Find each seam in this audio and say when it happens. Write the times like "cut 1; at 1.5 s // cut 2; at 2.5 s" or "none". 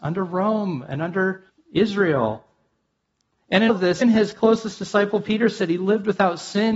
cut 1; at 1.5 s // cut 2; at 3.7 s // cut 3; at 4.0 s